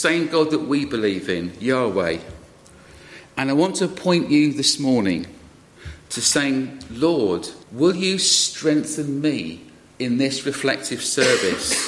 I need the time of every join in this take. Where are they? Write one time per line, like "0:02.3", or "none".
0:07.6